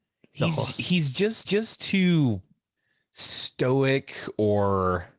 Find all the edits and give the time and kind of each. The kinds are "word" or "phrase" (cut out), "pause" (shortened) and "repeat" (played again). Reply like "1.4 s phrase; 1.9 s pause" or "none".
1.4 s repeat